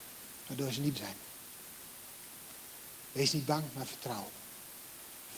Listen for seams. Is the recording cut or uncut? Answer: cut